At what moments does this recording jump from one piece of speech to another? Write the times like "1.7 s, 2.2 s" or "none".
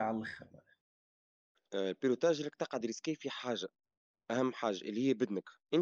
none